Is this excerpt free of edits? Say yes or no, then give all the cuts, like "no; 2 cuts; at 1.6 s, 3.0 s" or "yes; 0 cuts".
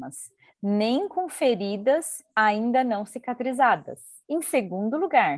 no; 2 cuts; at 2.3 s, 4.2 s